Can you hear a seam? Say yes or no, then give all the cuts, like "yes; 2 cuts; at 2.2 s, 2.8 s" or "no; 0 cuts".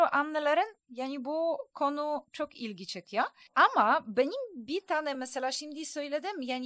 no; 0 cuts